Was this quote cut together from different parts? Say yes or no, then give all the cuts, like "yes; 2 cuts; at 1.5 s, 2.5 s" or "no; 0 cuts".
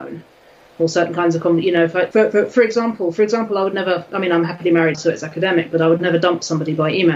yes; 2 cuts; at 2.1 s, 4.9 s